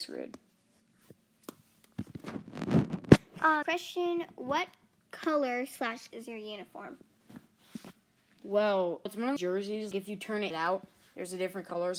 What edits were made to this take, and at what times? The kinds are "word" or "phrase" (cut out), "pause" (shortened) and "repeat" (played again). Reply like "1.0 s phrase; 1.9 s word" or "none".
3.6 s word; 6.1 s word; 9.1 s word; 9.4 s word; 9.9 s word; 10.5 s word